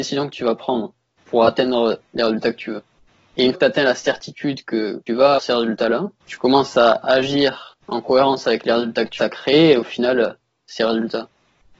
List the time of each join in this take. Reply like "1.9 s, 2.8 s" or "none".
1.2 s, 3.1 s, 3.5 s, 5.1 s, 5.4 s, 6.2 s, 7.8 s, 9.2 s